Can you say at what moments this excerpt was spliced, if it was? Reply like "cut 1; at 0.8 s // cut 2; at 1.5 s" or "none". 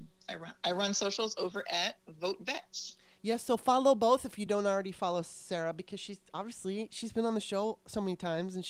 none

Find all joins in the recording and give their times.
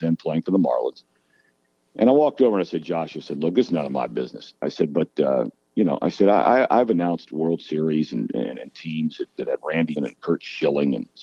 cut 1; at 10.0 s

